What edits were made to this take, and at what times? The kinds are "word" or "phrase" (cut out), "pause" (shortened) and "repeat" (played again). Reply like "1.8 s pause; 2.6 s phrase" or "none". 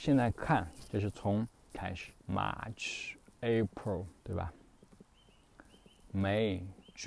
1.7 s word; 2.2 s pause; 4.2 s pause